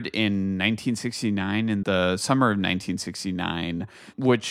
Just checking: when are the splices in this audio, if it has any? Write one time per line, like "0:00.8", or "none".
0:01.8

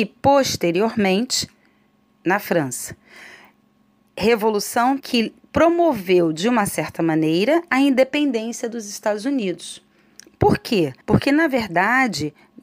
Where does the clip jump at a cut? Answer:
0:05.0
0:11.0

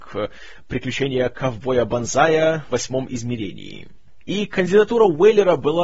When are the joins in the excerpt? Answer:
0:02.7

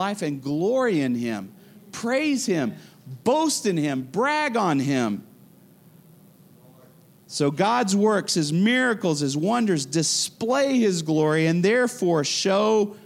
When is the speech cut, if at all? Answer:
none

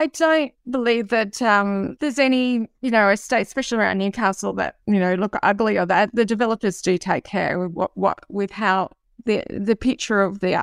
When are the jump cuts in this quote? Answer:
0:02.0
0:04.8

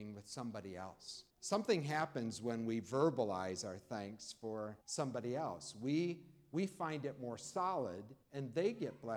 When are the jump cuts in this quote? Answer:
0:01.3
0:04.8
0:08.2

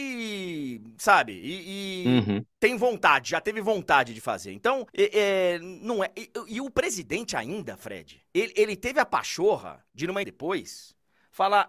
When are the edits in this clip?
0:02.5
0:04.9
0:08.3
0:09.9
0:10.2

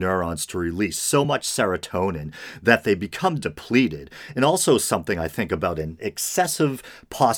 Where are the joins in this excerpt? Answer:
none

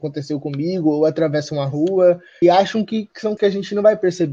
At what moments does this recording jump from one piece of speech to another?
0:02.4
0:03.4

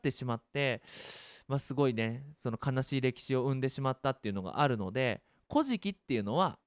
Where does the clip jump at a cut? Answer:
none

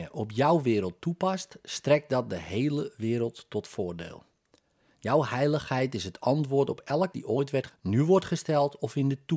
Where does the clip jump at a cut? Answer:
0:07.1
0:07.7

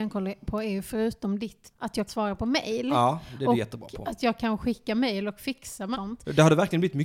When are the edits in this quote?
0:01.7
0:02.1
0:05.9

